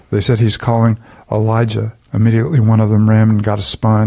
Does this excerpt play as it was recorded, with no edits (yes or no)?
no